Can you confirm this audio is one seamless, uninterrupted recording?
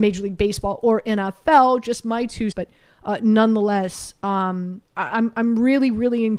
no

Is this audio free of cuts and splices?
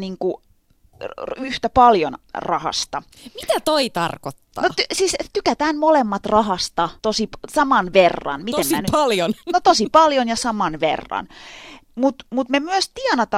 no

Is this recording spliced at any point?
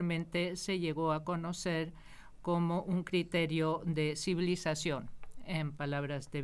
no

